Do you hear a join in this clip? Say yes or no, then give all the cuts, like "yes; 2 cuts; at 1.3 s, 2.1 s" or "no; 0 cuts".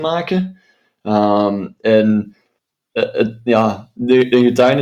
no; 0 cuts